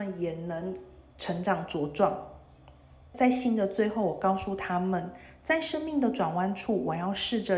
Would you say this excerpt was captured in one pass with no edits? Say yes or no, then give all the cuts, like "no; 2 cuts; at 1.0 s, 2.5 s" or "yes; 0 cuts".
no; 1 cut; at 1.1 s